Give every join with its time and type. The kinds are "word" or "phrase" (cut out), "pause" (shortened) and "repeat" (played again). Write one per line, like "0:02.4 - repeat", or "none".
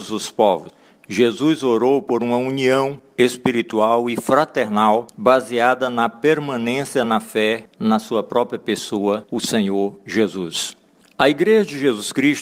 none